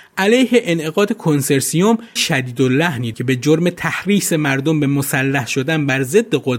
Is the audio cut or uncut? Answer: cut